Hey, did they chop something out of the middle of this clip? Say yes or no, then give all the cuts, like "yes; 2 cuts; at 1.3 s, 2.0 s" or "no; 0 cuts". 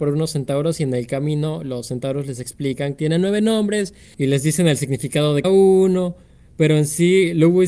yes; 2 cuts; at 3.0 s, 5.4 s